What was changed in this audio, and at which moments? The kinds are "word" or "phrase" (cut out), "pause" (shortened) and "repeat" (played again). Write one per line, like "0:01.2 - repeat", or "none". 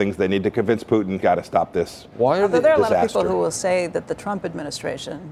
0:01.2 - word